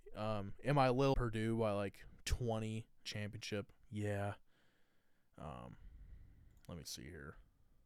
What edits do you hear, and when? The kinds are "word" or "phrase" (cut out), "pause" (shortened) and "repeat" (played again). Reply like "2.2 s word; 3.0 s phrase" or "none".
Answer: 1.1 s phrase; 3.0 s phrase; 3.8 s pause